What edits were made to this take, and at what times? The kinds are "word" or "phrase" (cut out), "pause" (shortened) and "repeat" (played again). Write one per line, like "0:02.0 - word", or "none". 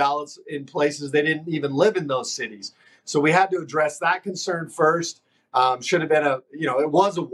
none